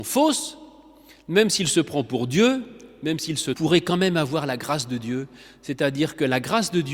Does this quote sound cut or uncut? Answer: cut